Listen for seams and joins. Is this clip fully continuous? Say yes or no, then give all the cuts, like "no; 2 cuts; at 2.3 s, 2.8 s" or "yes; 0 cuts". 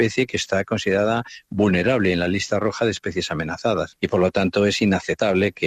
yes; 0 cuts